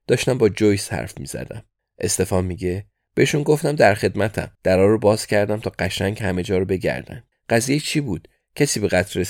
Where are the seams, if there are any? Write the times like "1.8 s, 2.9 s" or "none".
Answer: 1.8 s, 4.5 s, 7.3 s